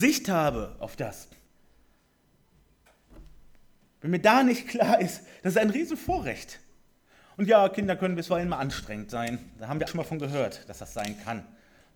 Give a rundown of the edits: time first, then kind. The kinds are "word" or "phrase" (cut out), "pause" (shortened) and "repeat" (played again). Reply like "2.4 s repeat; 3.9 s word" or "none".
9.9 s word